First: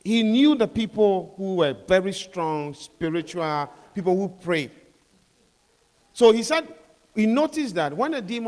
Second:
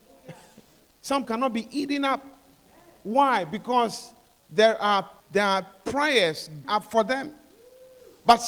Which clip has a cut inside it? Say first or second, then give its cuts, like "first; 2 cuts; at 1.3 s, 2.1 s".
second; 3 cuts; at 1.2 s, 5.2 s, 6.6 s